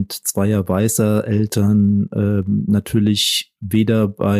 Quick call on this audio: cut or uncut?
uncut